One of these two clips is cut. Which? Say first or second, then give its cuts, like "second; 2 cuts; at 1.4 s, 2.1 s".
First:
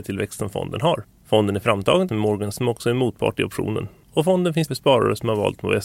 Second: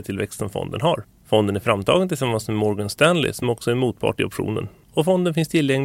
first; 3 cuts; at 2.1 s, 2.5 s, 4.7 s